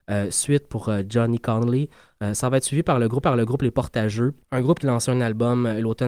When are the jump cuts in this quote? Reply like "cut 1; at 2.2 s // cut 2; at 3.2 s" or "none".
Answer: cut 1; at 3.2 s // cut 2; at 4.4 s // cut 3; at 4.8 s